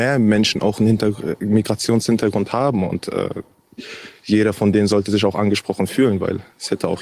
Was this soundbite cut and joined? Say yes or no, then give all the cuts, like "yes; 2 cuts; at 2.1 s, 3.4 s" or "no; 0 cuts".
no; 0 cuts